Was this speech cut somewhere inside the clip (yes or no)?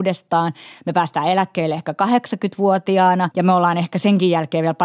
no